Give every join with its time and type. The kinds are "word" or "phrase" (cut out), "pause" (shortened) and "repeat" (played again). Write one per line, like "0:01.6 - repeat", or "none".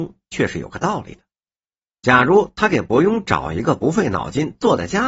none